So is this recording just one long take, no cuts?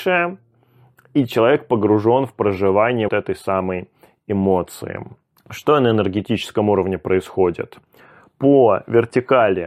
no; 2 cuts; at 3.1 s, 5.3 s

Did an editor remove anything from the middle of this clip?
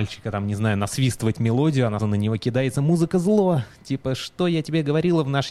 yes; 1 cut; at 2.0 s

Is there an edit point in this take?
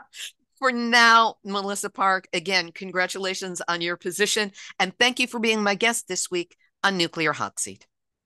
no; 0 cuts

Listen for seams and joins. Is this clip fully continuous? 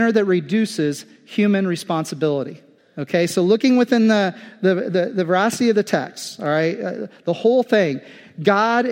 no; 1 cut; at 2.8 s

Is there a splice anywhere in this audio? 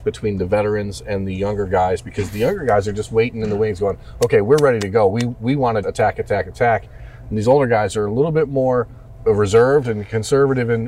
yes; 2 cuts; at 5.8 s, 9.2 s

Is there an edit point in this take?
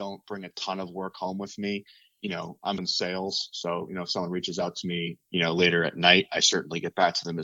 yes; 1 cut; at 2.8 s

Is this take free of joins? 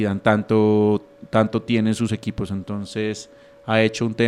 yes; 0 cuts

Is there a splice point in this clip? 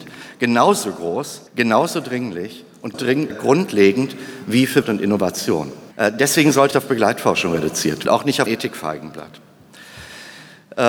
yes; 8 cuts; at 1.5 s, 2.9 s, 3.3 s, 4.8 s, 5.9 s, 6.7 s, 8.0 s, 8.5 s

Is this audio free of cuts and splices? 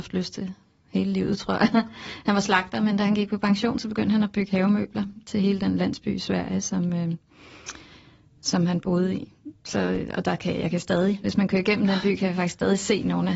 yes; 0 cuts

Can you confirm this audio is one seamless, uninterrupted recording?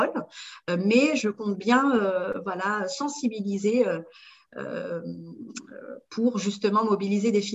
yes; 0 cuts

